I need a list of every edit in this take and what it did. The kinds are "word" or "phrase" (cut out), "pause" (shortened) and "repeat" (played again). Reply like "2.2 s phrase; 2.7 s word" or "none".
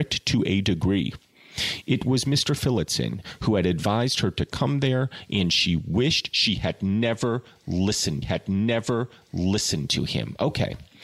8.2 s repeat